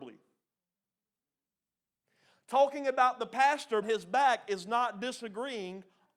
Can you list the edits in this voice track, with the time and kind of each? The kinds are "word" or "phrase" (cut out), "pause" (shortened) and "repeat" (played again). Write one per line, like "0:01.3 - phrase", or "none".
0:03.8 - word

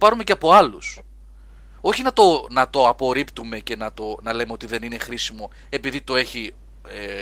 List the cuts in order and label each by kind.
none

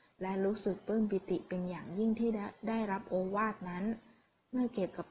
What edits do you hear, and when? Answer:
none

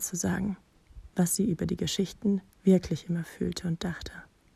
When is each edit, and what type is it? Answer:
0:01.1 - pause

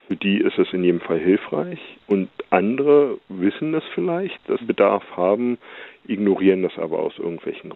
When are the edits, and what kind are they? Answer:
0:02.0 - pause
0:04.6 - word

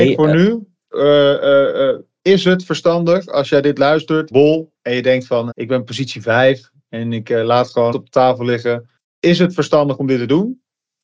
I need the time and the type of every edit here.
0:04.3 - phrase
0:04.8 - pause
0:05.5 - word
0:07.9 - word
0:09.0 - pause

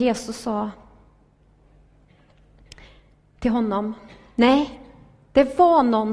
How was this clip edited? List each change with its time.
none

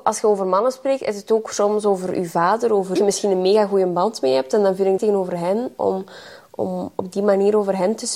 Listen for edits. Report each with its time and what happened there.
0:03.0 - phrase
0:05.0 - phrase

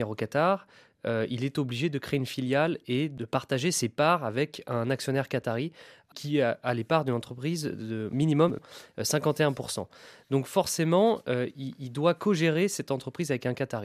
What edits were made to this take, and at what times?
none

